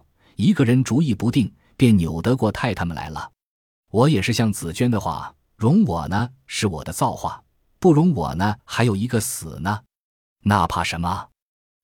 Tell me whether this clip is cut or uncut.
cut